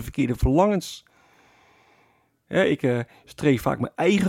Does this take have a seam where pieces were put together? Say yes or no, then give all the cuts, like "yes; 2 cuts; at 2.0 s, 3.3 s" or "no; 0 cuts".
no; 0 cuts